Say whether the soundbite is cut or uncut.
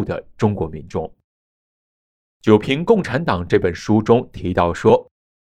uncut